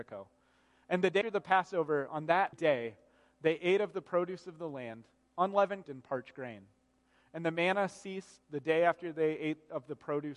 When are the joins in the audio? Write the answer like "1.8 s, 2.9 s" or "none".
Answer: 1.2 s, 2.5 s, 5.8 s